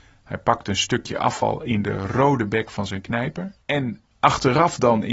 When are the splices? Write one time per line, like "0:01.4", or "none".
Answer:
0:03.6